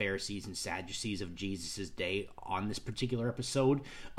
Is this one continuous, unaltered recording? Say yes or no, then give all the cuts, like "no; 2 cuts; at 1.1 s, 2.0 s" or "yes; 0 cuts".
yes; 0 cuts